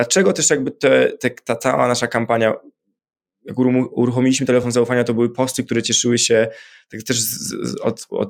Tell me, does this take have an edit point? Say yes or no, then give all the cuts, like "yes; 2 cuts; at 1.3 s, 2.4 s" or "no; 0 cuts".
no; 0 cuts